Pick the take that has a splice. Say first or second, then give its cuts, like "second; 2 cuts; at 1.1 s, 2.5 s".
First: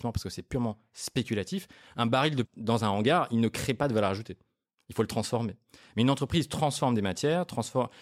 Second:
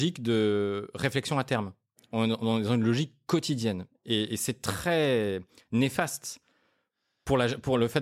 first; 1 cut; at 2.4 s